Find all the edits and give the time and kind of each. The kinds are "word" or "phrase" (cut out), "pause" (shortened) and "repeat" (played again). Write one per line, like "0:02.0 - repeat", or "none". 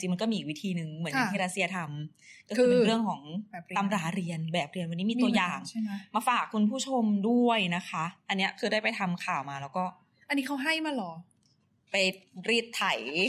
none